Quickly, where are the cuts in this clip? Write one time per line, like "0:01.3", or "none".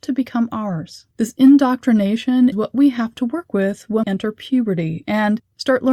0:01.1
0:02.5
0:04.0